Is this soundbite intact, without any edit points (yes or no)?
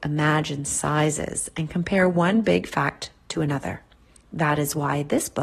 yes